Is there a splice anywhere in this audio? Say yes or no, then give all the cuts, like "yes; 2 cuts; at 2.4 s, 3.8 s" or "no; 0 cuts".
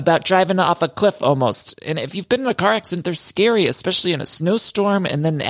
no; 0 cuts